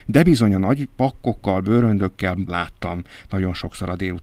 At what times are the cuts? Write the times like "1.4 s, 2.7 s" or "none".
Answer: 2.5 s